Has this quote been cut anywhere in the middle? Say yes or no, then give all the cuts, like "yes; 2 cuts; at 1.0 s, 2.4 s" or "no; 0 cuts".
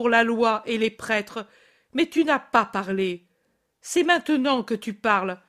no; 0 cuts